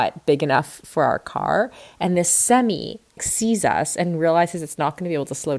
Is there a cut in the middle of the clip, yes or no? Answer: yes